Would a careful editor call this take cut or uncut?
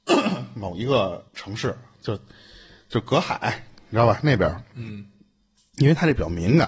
cut